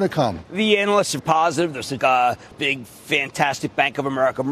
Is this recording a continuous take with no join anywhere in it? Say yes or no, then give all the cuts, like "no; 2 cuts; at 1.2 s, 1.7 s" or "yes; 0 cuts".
no; 3 cuts; at 1.2 s, 2.0 s, 2.5 s